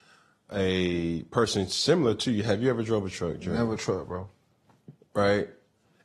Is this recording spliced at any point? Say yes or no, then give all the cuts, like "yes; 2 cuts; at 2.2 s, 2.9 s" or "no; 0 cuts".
yes; 1 cut; at 3.8 s